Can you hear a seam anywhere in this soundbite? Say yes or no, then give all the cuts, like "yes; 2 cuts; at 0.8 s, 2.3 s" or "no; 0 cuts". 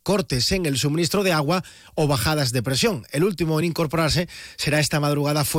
no; 0 cuts